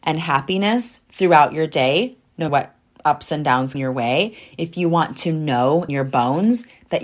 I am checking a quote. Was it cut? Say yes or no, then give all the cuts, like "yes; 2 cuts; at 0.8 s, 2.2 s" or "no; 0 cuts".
yes; 3 cuts; at 2.5 s, 3.7 s, 5.9 s